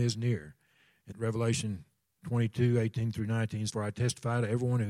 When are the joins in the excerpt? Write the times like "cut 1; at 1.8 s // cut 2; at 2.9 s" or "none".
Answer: cut 1; at 1.1 s // cut 2; at 3.7 s